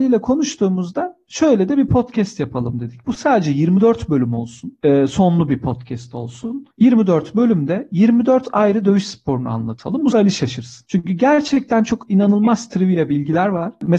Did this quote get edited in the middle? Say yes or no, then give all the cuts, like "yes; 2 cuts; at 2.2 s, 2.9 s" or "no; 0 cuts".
yes; 2 cuts; at 6.7 s, 10.1 s